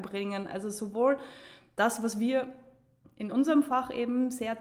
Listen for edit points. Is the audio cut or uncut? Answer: uncut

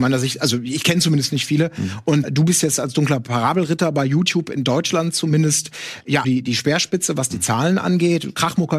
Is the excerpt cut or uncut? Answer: cut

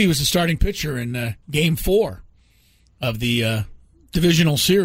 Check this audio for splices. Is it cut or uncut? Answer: uncut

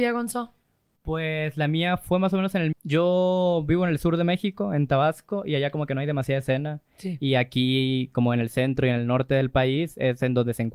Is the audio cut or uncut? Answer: cut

